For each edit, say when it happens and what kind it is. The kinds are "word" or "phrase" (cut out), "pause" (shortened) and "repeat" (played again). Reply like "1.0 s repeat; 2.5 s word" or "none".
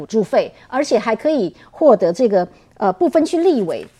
none